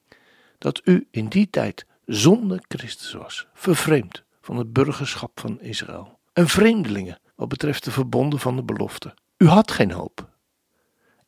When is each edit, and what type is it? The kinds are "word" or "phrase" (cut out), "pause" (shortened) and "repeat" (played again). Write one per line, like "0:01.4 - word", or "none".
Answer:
0:06.3 - pause
0:07.3 - pause
0:09.3 - pause